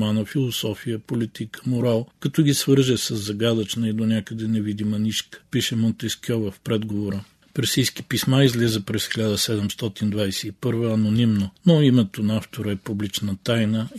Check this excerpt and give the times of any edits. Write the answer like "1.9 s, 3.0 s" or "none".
none